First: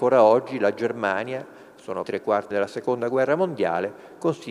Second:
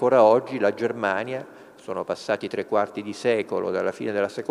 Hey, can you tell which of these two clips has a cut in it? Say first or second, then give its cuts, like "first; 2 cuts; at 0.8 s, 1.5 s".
first; 2 cuts; at 2.0 s, 2.5 s